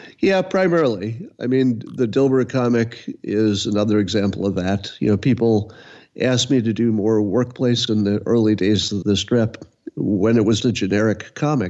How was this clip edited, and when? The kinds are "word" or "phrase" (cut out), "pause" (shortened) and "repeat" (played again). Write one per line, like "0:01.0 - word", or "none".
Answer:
0:07.9 - word
0:09.0 - word
0:10.6 - word